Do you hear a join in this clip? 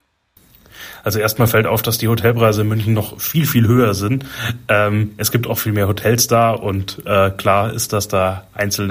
no; 0 cuts

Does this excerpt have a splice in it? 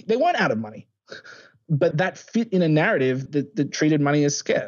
yes; 2 cuts; at 1.9 s, 3.3 s

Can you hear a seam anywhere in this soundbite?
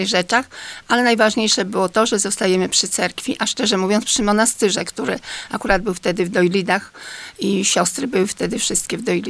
no; 0 cuts

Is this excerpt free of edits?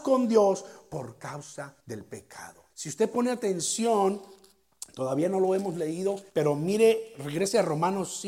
no; 3 cuts; at 1.8 s, 2.7 s, 6.3 s

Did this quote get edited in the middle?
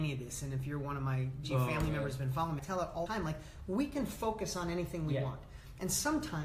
yes; 3 cuts; at 1.4 s, 2.6 s, 3.1 s

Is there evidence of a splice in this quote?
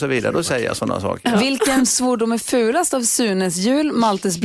no; 0 cuts

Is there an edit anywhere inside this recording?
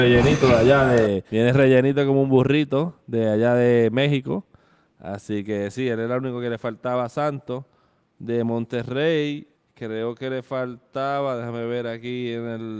yes; 2 cuts; at 1.3 s, 9.5 s

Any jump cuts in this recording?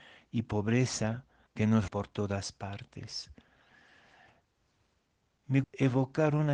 yes; 3 cuts; at 1.5 s, 1.9 s, 5.6 s

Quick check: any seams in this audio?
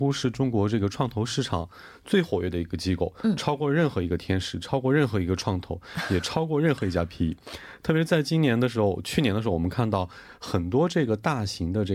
no; 0 cuts

